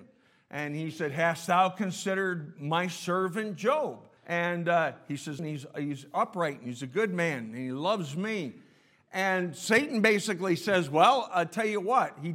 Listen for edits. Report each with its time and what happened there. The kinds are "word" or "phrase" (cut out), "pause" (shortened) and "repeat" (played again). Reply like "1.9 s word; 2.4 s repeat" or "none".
4.2 s pause; 5.4 s word